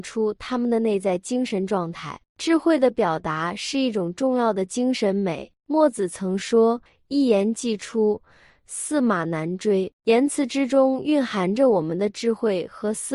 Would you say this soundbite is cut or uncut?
cut